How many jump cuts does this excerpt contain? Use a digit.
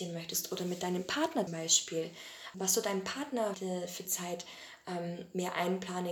4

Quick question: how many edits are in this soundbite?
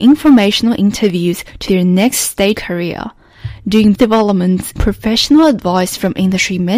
4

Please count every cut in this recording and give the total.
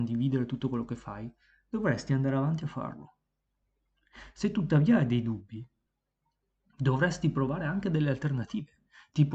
0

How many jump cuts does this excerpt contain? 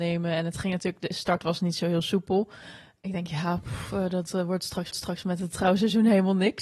1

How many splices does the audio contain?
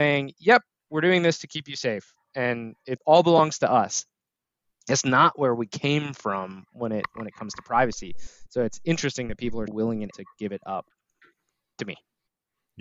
3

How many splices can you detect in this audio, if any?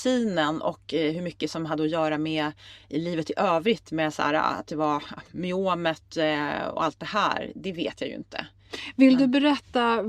0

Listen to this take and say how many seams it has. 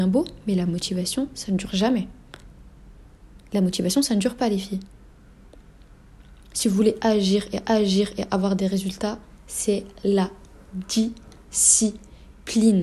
1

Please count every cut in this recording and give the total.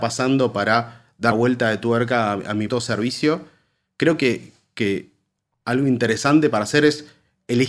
2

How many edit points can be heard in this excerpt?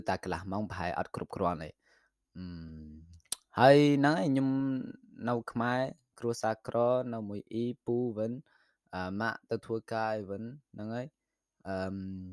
0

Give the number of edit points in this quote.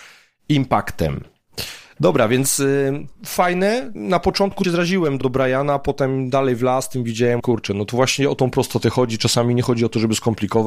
3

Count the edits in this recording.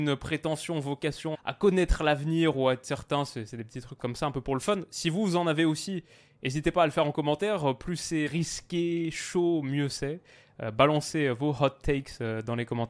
3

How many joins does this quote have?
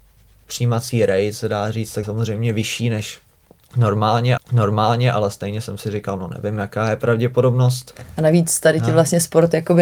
2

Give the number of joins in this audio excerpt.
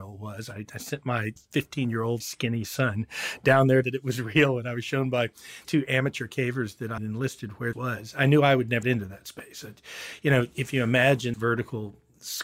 8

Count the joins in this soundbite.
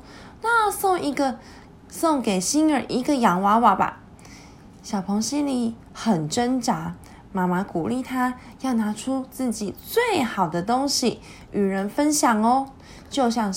0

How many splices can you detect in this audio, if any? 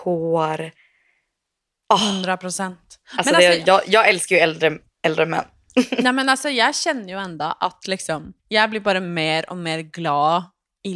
1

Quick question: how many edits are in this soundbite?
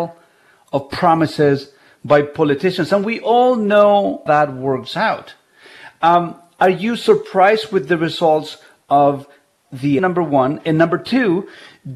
2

